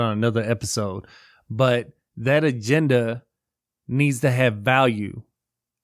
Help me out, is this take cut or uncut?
uncut